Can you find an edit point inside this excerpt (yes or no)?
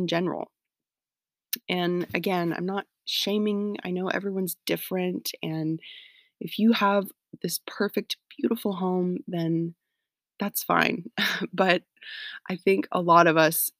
no